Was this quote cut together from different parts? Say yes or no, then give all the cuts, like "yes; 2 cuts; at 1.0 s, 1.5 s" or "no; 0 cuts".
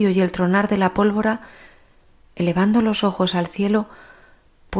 no; 0 cuts